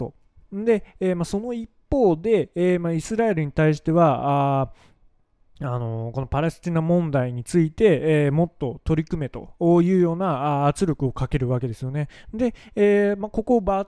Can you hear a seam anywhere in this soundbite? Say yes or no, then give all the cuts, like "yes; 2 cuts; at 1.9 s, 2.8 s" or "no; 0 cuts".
no; 0 cuts